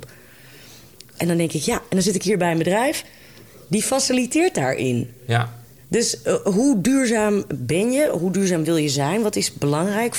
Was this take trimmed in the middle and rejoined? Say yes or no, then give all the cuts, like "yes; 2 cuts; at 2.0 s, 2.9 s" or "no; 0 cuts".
no; 0 cuts